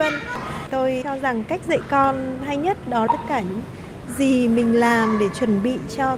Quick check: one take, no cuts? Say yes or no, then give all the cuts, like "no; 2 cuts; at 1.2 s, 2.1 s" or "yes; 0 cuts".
no; 2 cuts; at 1.0 s, 3.1 s